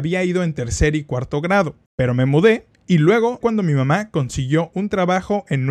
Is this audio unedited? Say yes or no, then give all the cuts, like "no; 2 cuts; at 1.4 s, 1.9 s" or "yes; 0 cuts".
no; 2 cuts; at 1.9 s, 3.4 s